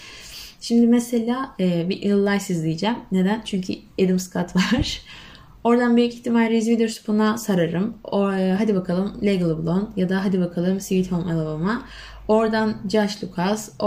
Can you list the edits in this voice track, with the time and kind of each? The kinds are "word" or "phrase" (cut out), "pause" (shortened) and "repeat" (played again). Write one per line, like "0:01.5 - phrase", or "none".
none